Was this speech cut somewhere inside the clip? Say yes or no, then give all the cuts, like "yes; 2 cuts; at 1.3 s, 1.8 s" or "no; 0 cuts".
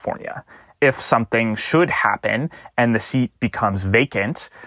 no; 0 cuts